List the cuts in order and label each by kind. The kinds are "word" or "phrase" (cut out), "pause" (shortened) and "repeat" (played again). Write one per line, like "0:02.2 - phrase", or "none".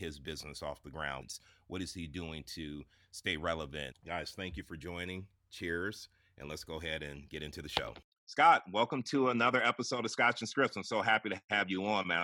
none